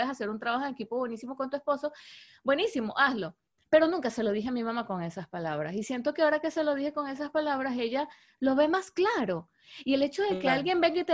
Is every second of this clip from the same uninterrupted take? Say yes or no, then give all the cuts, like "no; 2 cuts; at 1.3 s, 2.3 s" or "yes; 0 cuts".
yes; 0 cuts